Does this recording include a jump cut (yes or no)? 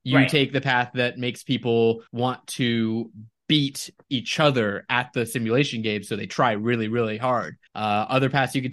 yes